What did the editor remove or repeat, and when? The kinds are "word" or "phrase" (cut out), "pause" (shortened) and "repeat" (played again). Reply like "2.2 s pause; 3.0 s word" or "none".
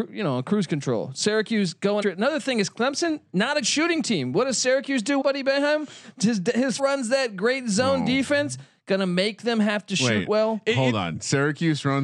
2.0 s word; 3.6 s word; 5.2 s word; 6.8 s word